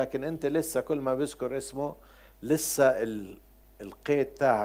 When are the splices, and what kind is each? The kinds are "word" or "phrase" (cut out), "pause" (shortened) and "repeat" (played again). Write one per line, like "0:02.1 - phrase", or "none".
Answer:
none